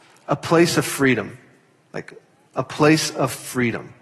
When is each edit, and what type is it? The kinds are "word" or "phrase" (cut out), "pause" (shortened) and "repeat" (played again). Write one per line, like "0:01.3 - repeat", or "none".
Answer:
none

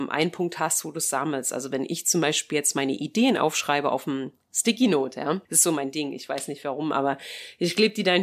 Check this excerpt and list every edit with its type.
0:05.4 - pause

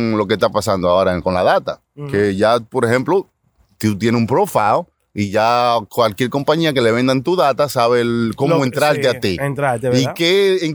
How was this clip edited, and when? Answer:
none

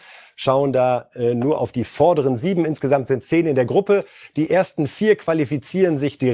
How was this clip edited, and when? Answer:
none

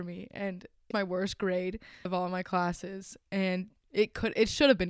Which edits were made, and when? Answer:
0:00.9 - word
0:02.1 - word

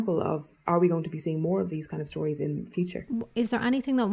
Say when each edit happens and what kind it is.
none

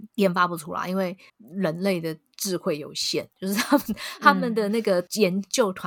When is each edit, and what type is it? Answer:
0:01.3 - pause

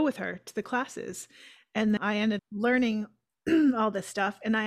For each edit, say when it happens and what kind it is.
0:02.0 - word
0:02.4 - word

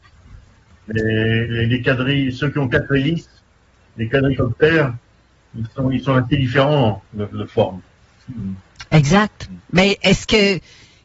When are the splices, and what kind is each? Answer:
none

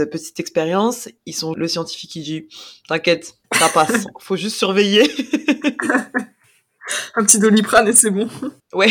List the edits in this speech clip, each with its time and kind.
0:01.2 - pause
0:01.5 - phrase
0:03.4 - pause

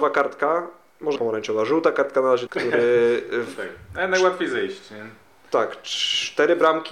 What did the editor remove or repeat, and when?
0:01.2 - word
0:02.5 - phrase

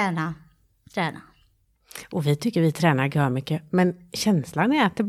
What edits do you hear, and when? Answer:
none

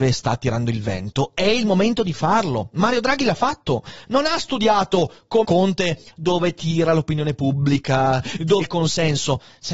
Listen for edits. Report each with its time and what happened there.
0:05.4 - word
0:08.6 - word

